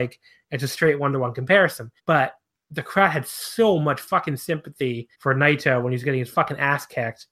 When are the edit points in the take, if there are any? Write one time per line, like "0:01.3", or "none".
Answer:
0:02.0
0:05.1